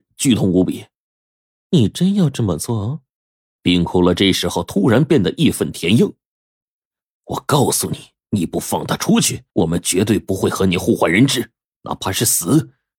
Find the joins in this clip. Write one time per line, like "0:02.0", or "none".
0:01.3
0:03.2
0:09.5